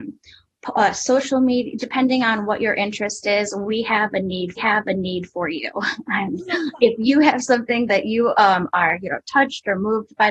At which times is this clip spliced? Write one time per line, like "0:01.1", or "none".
0:04.6